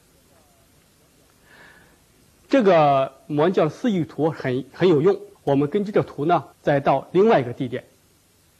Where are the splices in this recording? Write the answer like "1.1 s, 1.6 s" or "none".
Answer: 5.4 s, 6.5 s